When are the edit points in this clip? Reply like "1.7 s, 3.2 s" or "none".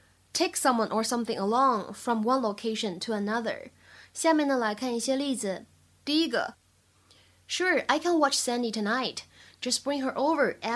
none